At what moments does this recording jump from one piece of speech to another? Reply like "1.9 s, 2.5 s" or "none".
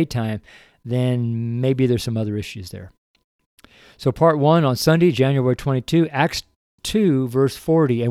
none